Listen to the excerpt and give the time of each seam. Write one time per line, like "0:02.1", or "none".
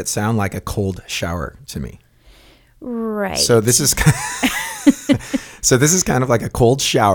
none

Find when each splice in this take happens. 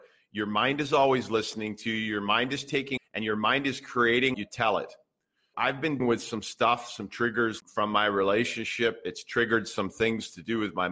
0:03.0
0:04.3
0:05.5
0:06.0
0:07.6

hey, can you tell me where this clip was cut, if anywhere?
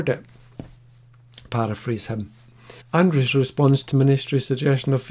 0:01.5
0:02.8
0:03.9

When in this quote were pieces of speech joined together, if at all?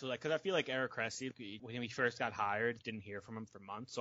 0:01.6
0:02.8

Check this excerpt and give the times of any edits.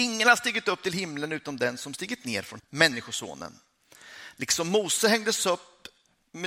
0:02.6

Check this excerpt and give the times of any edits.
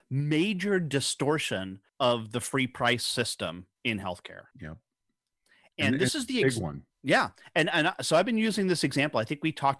0:01.9
0:03.8
0:04.5
0:06.9

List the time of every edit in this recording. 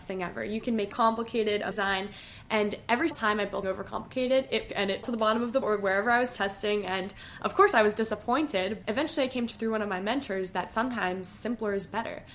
0:00.9
0:01.7
0:03.1
0:03.6
0:04.7
0:05.0
0:05.6
0:08.8
0:09.5

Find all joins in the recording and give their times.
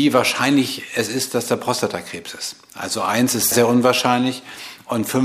0:03.5

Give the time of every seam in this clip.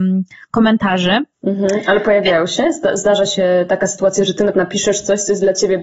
0:01.3
0:04.5

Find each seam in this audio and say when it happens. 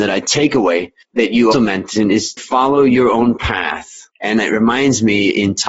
0:01.0
0:01.5
0:02.4

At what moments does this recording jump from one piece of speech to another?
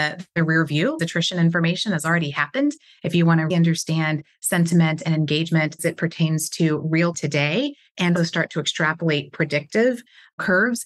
0:01.0
0:03.5
0:05.8
0:07.1
0:08.2

